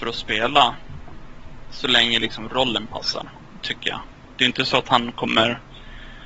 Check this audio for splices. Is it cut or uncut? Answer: uncut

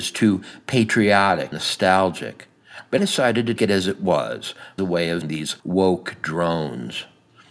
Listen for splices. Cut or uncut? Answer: cut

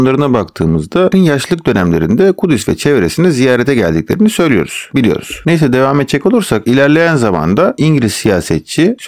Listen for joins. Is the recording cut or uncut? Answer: cut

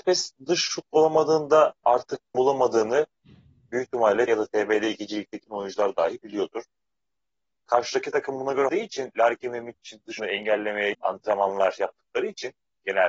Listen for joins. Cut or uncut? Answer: cut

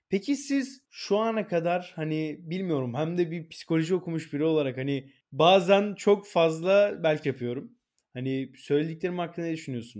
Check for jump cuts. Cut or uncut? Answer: cut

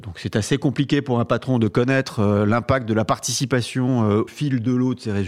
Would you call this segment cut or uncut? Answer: cut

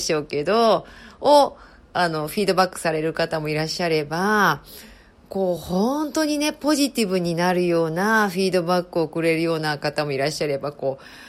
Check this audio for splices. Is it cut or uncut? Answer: uncut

